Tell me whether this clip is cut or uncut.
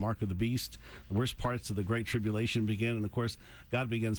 uncut